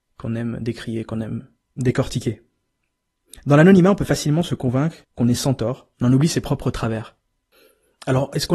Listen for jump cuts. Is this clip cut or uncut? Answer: cut